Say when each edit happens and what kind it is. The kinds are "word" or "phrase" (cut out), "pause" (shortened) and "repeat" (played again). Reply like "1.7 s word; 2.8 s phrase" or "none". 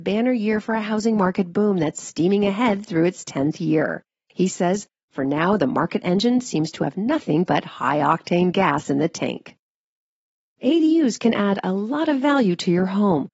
none